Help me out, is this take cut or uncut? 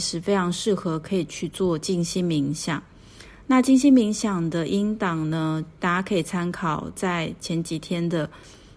uncut